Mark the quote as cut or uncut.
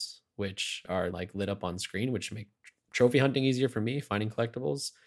cut